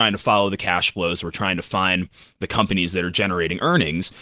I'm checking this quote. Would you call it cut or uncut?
uncut